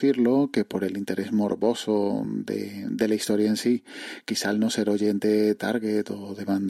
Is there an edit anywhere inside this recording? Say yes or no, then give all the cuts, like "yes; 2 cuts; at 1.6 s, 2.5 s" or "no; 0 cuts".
no; 0 cuts